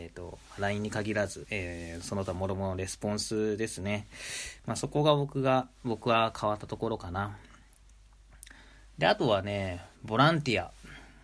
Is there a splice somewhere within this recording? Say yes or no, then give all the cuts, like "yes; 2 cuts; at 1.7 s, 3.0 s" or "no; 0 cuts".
yes; 1 cut; at 1.4 s